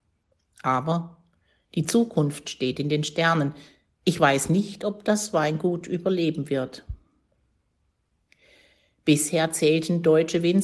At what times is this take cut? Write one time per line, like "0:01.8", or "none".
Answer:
none